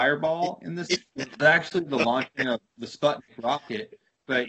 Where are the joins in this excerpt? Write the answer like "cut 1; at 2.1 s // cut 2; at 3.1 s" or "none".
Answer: none